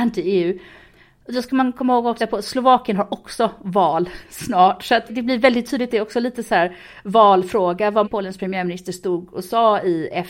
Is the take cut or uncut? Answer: cut